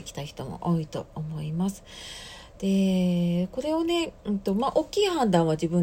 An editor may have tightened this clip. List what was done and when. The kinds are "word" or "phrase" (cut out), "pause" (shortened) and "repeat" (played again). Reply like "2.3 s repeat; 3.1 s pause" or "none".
4.2 s pause